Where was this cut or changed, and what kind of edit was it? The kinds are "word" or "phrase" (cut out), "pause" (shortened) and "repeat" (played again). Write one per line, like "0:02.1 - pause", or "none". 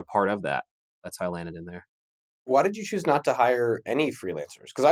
none